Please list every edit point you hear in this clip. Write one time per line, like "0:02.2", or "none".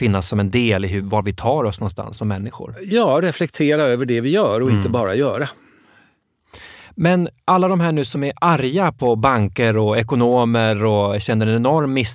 none